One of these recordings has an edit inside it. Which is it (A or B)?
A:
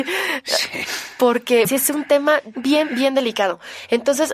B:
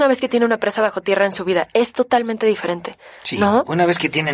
A